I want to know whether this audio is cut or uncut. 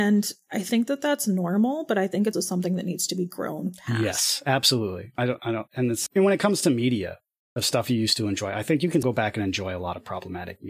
cut